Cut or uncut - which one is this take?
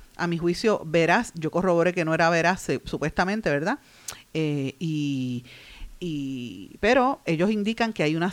uncut